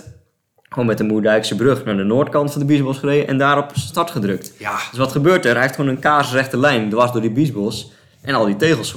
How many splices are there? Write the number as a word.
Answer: zero